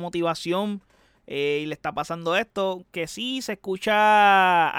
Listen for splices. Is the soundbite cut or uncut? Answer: uncut